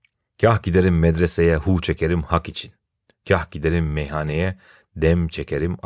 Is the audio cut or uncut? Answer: uncut